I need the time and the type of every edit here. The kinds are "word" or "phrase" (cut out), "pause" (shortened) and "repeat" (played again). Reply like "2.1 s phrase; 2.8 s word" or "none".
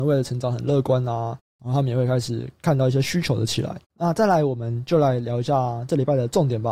3.8 s pause